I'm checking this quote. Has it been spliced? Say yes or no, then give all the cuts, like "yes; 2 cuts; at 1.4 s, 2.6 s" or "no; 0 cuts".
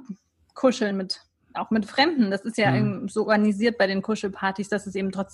no; 0 cuts